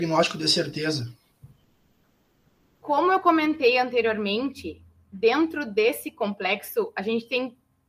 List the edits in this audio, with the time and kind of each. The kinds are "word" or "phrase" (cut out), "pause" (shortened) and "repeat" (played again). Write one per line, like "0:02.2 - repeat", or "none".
none